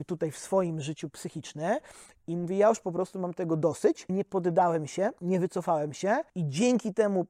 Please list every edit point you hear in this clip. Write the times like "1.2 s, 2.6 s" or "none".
4.1 s, 6.3 s